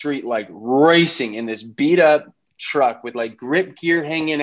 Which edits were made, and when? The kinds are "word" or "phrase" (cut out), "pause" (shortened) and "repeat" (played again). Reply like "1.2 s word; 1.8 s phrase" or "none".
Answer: none